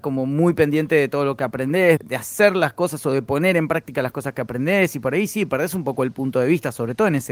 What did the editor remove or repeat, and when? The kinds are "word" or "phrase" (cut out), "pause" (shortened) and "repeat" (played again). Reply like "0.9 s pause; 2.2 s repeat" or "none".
2.0 s word